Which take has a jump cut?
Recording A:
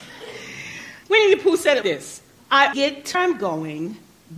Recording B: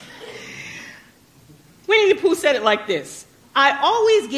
A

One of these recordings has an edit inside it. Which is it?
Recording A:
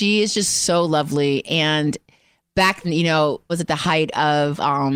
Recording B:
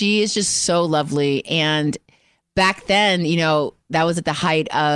A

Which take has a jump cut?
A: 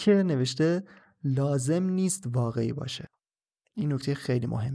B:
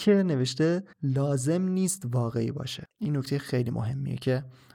B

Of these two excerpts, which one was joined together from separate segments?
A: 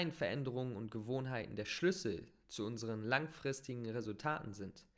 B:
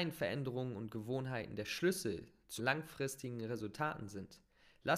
B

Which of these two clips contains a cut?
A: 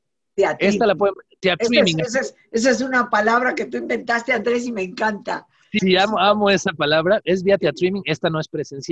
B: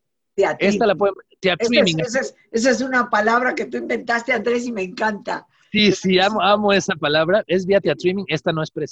A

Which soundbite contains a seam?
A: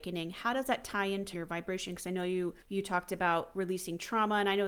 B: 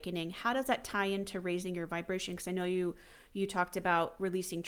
A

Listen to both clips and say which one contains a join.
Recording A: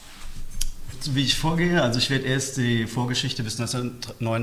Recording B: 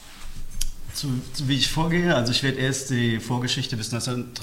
A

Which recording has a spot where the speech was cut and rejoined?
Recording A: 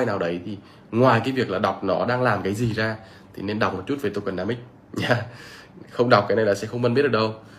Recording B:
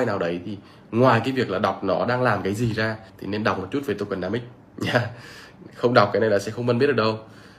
B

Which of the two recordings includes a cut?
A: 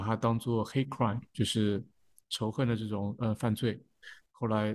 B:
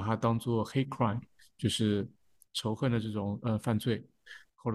A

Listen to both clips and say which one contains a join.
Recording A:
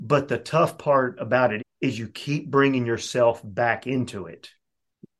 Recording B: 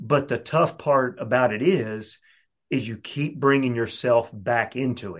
A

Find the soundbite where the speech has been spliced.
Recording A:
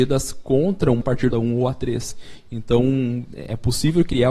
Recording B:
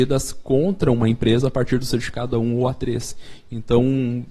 A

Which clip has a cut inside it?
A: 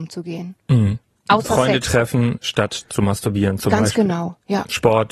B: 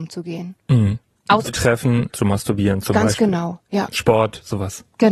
B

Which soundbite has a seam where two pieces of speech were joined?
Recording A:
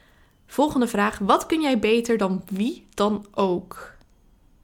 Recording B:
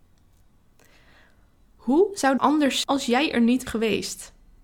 B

